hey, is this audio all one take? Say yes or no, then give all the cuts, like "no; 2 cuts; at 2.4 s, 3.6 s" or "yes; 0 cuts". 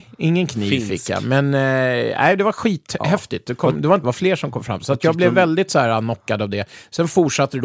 no; 1 cut; at 4.0 s